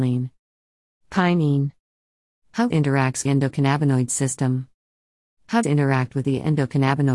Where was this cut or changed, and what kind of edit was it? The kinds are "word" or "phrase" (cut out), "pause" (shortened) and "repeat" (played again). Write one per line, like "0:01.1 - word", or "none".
0:02.7 - word
0:03.3 - phrase
0:05.6 - phrase